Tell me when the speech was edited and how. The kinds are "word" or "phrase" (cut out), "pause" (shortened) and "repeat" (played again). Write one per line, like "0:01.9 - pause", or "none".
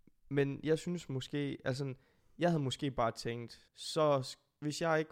0:03.7 - pause